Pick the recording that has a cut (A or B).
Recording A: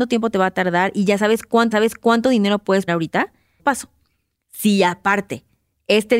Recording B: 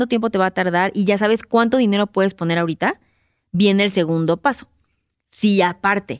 A